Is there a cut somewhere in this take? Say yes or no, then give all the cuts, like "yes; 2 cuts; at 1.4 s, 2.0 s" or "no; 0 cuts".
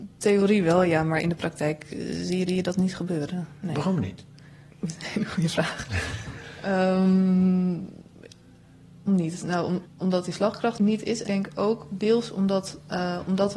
yes; 6 cuts; at 2.5 s, 4.7 s, 9.1 s, 9.9 s, 10.8 s, 11.3 s